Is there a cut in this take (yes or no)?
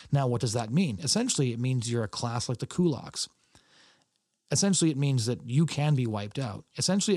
no